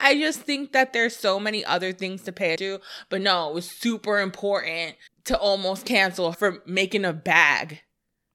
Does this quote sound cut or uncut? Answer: cut